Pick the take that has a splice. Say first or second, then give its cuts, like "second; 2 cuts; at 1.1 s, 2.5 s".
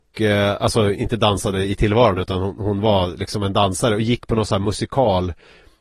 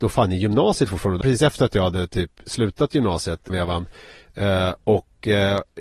second; 2 cuts; at 1.2 s, 3.5 s